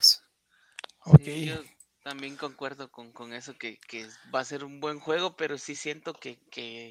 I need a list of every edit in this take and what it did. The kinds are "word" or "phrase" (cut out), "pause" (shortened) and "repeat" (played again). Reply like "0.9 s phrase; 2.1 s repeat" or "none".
none